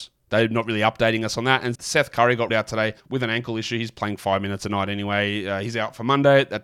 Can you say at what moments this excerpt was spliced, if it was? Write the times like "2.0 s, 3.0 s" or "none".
1.7 s, 2.5 s, 3.0 s